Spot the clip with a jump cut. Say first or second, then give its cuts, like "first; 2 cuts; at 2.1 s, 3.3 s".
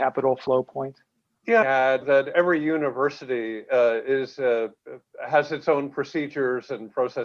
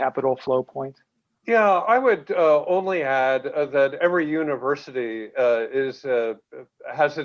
first; 2 cuts; at 1.6 s, 2.0 s